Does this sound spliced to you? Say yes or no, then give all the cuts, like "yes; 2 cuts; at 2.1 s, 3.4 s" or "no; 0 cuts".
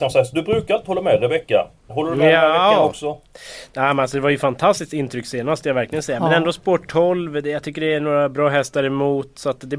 yes; 1 cut; at 5.6 s